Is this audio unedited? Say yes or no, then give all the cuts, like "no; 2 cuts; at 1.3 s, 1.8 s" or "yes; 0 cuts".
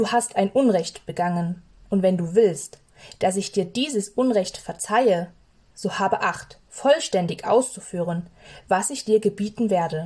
yes; 0 cuts